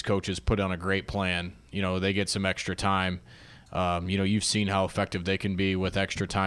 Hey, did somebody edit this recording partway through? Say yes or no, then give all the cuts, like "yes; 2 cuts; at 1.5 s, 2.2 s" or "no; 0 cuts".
no; 0 cuts